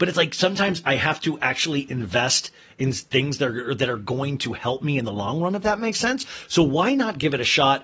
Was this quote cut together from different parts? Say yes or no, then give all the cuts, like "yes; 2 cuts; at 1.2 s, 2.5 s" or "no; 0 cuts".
no; 0 cuts